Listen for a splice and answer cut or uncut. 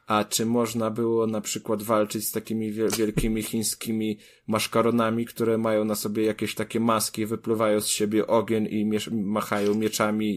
uncut